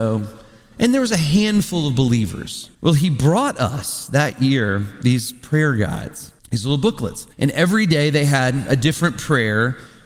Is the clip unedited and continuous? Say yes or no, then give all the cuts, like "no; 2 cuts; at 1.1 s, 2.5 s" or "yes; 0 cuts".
no; 3 cuts; at 2.7 s, 6.4 s, 7.3 s